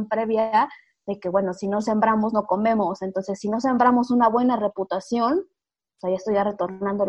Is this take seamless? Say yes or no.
yes